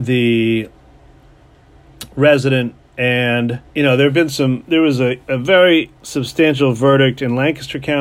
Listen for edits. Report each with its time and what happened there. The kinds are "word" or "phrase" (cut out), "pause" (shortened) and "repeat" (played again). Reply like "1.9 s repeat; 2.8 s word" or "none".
3.7 s pause; 6.0 s pause